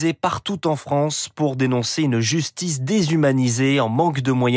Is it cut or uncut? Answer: uncut